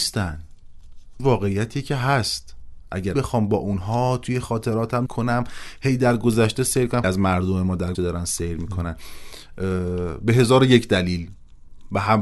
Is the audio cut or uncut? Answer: cut